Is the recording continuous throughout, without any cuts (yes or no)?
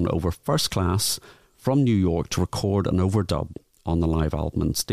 yes